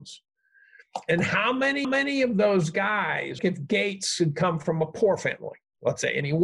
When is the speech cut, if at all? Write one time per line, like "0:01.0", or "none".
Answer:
0:01.8
0:03.4